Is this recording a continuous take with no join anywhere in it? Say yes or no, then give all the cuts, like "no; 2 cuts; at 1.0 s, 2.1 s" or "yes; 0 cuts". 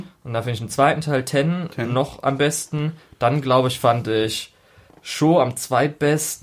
yes; 0 cuts